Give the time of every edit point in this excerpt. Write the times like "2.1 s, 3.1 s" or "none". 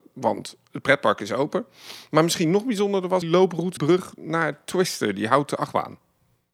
3.2 s, 3.8 s